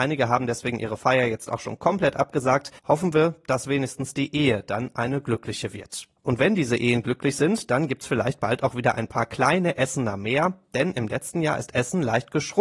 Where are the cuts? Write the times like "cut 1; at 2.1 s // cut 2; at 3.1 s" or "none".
cut 1; at 2.8 s // cut 2; at 6.2 s

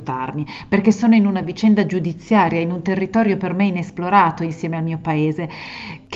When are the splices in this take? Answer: none

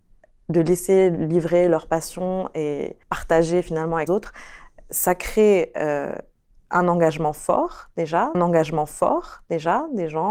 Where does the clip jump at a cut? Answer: cut 1; at 3.0 s // cut 2; at 4.1 s // cut 3; at 8.3 s

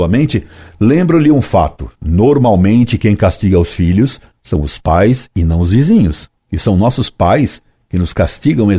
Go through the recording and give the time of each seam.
none

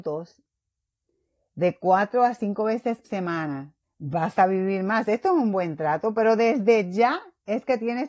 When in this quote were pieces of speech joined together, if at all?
cut 1; at 3.0 s // cut 2; at 3.8 s

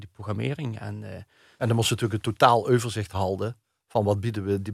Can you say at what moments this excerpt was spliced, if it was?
none

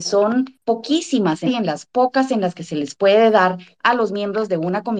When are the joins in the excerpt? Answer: cut 1; at 1.5 s

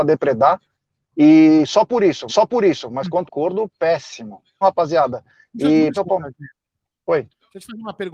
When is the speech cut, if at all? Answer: cut 1; at 2.3 s // cut 2; at 3.3 s // cut 3; at 4.6 s // cut 4; at 5.9 s

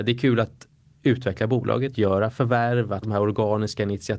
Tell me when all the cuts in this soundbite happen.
cut 1; at 1.9 s // cut 2; at 3.0 s

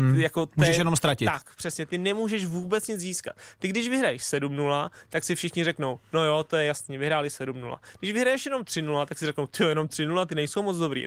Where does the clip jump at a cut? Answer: none

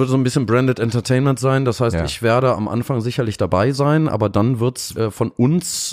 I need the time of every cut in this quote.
cut 1; at 4.9 s

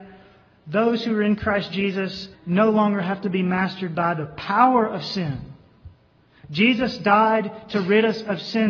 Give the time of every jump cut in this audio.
cut 1; at 2.3 s

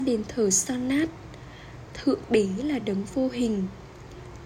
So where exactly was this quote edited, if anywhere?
none

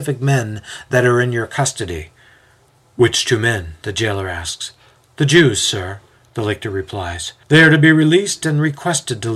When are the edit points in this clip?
cut 1; at 7.4 s

